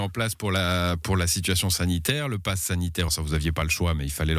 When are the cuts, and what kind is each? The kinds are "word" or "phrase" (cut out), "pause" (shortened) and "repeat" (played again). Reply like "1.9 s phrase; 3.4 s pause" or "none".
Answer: 3.1 s word